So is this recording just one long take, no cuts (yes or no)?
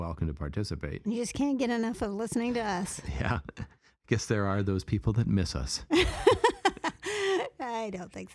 yes